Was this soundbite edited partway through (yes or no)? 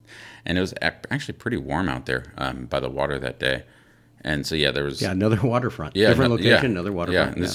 no